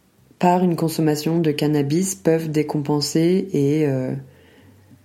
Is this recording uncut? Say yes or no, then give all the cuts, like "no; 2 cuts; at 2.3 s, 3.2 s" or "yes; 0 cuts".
yes; 0 cuts